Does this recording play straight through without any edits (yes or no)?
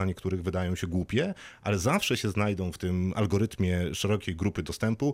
yes